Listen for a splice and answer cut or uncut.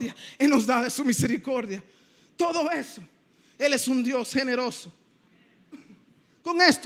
uncut